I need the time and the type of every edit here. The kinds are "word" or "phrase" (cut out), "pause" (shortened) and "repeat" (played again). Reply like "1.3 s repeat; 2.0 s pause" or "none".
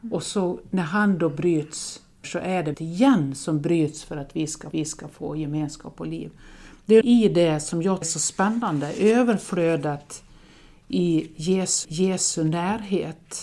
2.2 s word; 2.7 s word; 4.7 s repeat; 7.0 s word; 8.0 s word; 11.8 s repeat